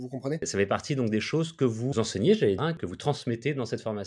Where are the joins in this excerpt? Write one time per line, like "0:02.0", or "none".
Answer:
0:01.9
0:02.6